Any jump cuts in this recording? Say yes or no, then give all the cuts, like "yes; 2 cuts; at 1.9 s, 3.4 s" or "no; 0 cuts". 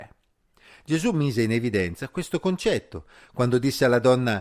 no; 0 cuts